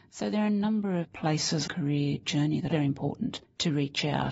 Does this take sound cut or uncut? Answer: cut